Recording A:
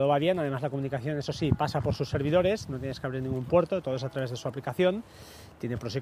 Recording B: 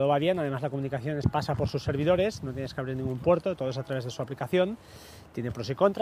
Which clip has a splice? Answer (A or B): B